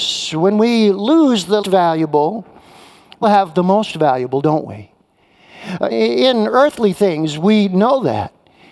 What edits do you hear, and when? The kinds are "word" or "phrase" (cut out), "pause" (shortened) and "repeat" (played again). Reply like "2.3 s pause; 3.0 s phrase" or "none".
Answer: 1.6 s word; 3.2 s word; 5.9 s word

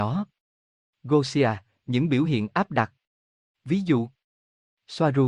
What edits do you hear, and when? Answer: none

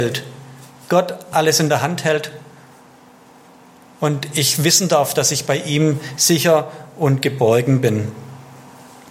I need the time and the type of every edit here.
none

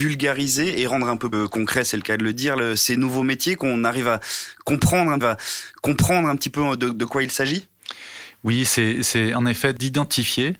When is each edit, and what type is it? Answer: 1.3 s word; 5.2 s repeat

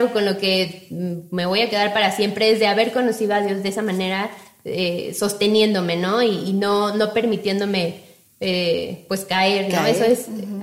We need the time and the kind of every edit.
none

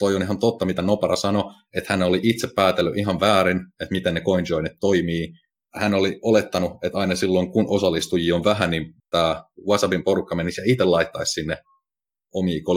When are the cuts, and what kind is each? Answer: 5.5 s pause; 9.0 s pause

